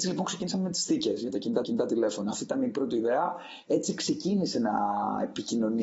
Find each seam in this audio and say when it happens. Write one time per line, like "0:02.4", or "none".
0:01.6